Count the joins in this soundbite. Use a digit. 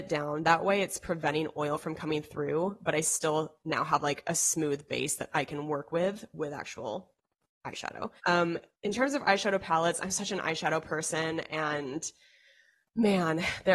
1